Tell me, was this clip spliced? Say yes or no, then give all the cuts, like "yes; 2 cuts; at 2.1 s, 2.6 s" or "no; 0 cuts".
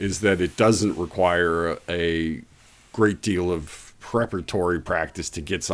no; 0 cuts